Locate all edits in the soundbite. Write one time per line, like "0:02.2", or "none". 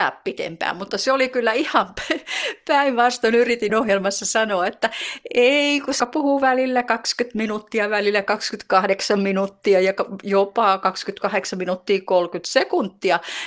0:03.7
0:06.0